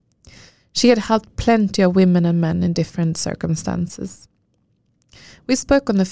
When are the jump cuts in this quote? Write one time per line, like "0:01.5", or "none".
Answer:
none